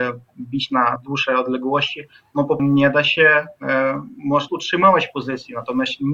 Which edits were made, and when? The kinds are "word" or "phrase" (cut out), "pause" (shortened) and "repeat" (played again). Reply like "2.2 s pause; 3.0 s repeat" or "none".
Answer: 1.0 s word; 2.6 s word; 4.5 s word